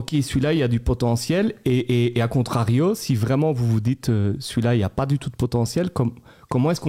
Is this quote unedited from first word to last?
yes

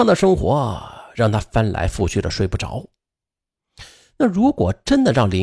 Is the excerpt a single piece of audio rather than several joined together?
yes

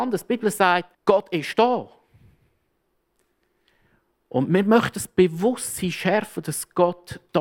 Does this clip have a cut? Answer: yes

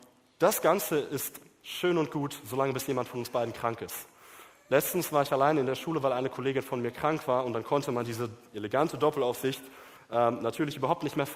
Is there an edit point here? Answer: no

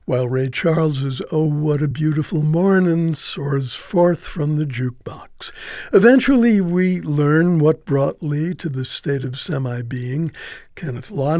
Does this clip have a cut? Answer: no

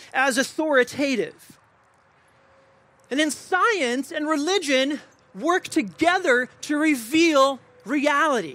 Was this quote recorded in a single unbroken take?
yes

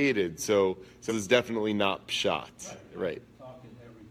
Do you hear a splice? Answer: yes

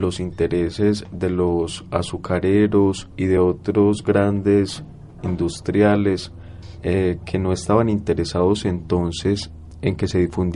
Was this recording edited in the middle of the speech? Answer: no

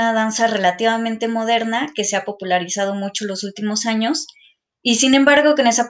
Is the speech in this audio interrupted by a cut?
no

